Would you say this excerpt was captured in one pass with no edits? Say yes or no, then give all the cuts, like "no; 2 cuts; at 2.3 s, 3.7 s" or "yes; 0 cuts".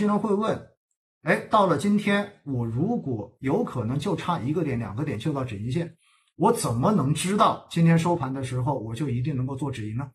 yes; 0 cuts